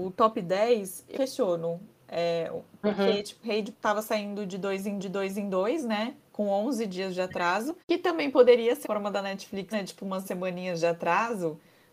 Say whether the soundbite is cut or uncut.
cut